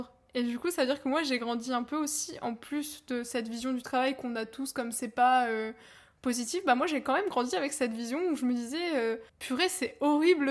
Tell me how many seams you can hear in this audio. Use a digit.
1